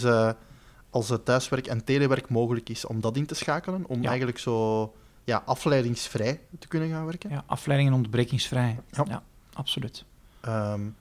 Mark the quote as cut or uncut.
uncut